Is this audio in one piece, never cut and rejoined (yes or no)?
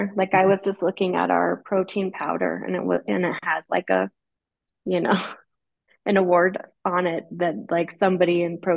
yes